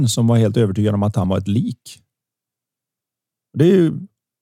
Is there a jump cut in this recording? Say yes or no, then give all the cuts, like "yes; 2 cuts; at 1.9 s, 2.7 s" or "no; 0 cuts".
no; 0 cuts